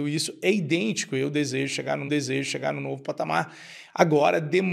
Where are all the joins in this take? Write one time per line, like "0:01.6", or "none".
0:02.1